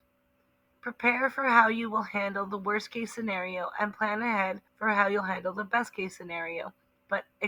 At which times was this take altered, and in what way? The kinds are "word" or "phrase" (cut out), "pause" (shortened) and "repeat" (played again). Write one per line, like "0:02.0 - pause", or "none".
0:04.7 - pause